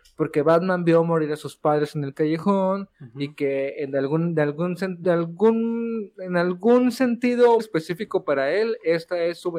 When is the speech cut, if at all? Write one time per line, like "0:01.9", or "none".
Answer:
0:05.0
0:07.6